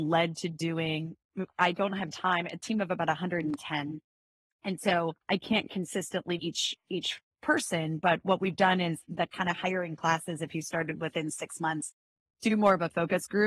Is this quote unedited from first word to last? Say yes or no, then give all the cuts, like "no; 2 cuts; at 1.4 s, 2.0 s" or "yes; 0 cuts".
no; 3 cuts; at 2.6 s, 5.2 s, 6.4 s